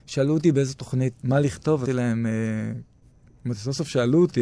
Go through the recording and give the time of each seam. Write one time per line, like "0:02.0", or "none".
0:01.2
0:01.9